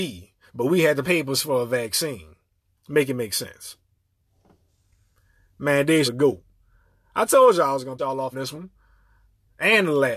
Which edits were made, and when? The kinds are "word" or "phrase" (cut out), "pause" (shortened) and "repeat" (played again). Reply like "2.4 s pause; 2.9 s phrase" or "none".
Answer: 1.0 s word; 6.0 s word; 8.0 s word; 8.3 s word